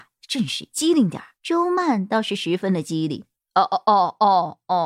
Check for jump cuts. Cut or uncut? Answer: cut